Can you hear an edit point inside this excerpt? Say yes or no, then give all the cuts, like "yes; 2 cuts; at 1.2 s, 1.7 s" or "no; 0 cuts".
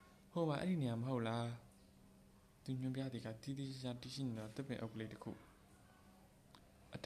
no; 0 cuts